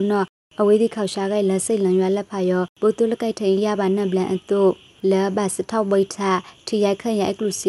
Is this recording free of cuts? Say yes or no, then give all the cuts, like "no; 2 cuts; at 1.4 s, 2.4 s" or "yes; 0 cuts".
no; 1 cut; at 2.7 s